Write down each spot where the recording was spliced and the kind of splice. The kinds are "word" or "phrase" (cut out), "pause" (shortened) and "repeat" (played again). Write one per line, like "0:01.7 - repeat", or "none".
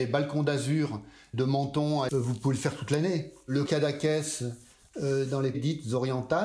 0:01.3 - word
0:02.1 - word
0:03.7 - word
0:05.5 - word